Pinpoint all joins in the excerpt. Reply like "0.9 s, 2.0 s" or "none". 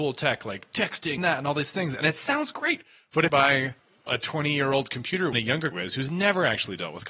1.2 s, 3.3 s, 5.3 s, 5.7 s